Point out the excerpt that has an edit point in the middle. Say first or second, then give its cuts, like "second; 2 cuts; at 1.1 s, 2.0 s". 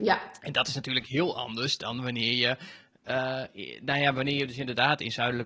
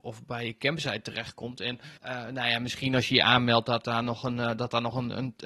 second; 1 cut; at 2.0 s